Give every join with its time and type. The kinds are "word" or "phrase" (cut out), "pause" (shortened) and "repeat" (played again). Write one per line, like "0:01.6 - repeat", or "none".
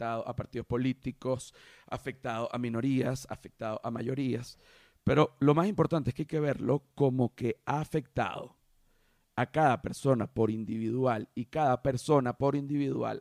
none